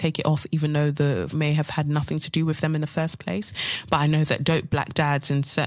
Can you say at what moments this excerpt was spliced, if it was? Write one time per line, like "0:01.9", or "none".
0:01.3